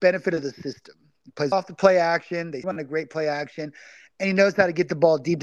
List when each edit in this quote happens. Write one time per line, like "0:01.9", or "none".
0:01.5
0:02.6